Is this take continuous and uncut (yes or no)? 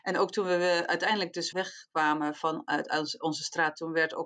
no